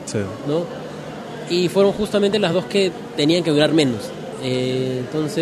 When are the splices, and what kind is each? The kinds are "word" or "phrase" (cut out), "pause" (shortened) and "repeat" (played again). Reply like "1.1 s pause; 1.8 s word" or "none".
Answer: none